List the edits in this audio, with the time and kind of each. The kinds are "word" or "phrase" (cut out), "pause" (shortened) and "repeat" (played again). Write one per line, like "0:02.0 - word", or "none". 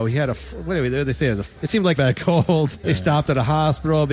0:01.5 - word
0:02.0 - phrase
0:02.8 - word